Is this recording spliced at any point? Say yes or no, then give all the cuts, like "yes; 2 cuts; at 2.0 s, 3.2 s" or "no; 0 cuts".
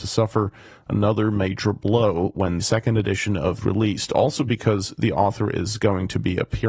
yes; 2 cuts; at 2.6 s, 3.6 s